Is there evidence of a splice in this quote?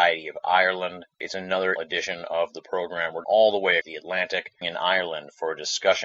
yes; 5 cuts; at 1.1 s, 1.8 s, 3.2 s, 3.8 s, 4.6 s

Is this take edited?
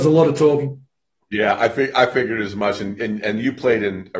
no; 0 cuts

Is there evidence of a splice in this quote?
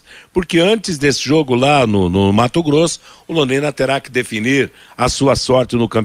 no; 0 cuts

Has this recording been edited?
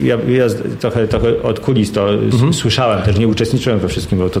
no; 0 cuts

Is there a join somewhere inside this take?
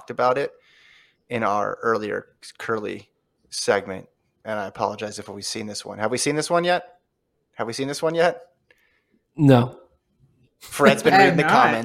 no; 0 cuts

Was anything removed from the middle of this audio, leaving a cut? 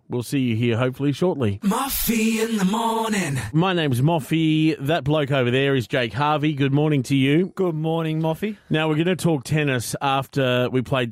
no; 0 cuts

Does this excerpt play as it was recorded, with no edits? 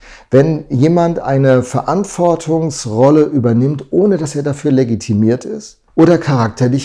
no; 1 cut; at 5.9 s

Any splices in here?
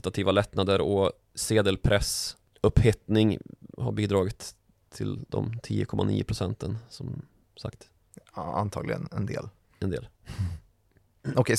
no; 0 cuts

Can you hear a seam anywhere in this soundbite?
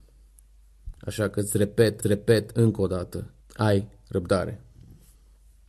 yes; 3 cuts; at 1.0 s, 2.0 s, 3.4 s

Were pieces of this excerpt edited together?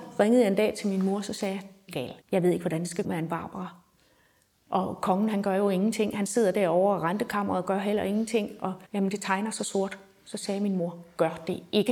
yes; 4 cuts; at 1.9 s, 2.2 s, 3.0 s, 8.8 s

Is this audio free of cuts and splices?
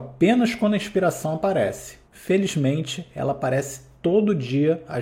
no; 1 cut; at 2.1 s

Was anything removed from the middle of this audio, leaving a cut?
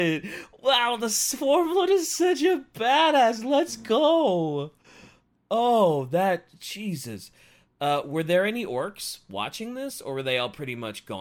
no; 0 cuts

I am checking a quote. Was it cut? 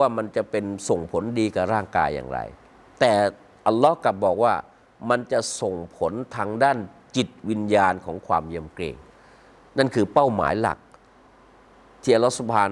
no; 0 cuts

